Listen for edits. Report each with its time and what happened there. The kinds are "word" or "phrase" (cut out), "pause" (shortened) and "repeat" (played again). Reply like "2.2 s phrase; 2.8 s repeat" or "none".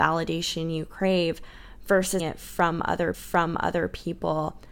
2.2 s word; 3.1 s repeat